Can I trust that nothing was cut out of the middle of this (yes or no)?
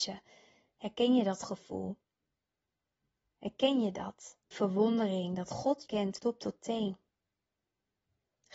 no